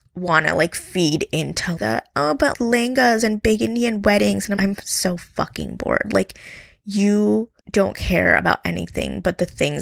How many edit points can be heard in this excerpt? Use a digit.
4